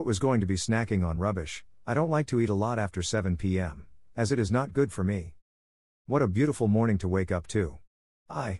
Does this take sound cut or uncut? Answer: uncut